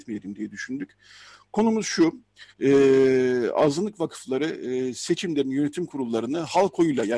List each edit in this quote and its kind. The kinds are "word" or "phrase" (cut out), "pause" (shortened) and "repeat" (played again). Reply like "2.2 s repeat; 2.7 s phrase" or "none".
2.5 s pause